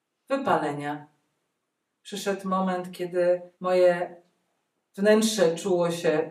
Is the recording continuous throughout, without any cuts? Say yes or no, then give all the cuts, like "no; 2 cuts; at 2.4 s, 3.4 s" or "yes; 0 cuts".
no; 1 cut; at 3.5 s